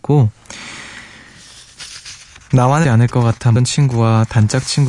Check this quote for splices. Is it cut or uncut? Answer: cut